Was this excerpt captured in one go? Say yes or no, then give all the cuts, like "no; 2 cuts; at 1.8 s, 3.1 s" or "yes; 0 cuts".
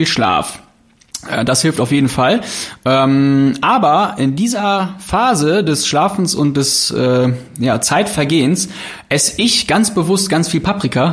yes; 0 cuts